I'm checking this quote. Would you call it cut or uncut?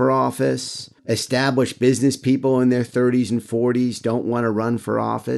cut